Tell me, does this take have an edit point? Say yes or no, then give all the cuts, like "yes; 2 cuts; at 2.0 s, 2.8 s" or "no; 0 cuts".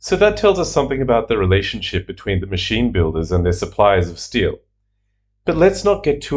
no; 0 cuts